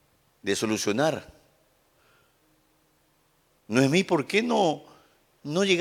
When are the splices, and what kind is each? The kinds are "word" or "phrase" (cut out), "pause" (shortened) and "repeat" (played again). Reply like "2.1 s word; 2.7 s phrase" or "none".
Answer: none